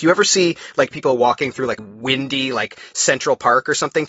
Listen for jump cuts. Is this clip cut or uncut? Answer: cut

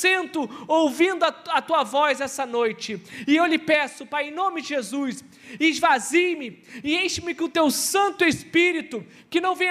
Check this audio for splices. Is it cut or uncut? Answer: uncut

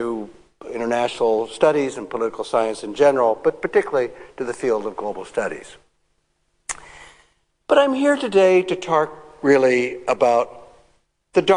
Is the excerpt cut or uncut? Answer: uncut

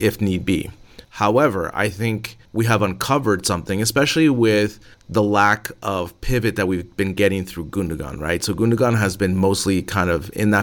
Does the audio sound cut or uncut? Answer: cut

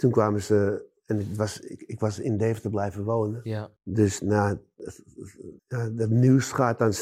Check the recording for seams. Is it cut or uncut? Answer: cut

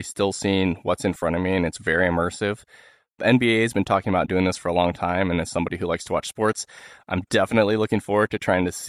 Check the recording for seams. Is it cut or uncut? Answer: uncut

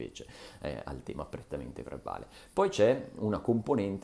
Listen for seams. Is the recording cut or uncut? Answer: uncut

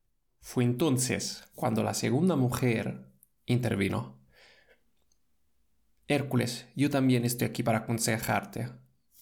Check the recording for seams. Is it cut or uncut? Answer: uncut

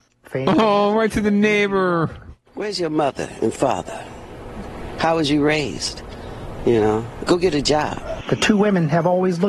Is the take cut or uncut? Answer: cut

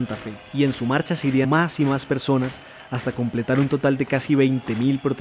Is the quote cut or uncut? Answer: cut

